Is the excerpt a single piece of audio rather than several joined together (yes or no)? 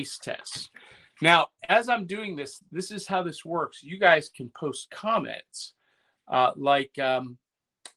yes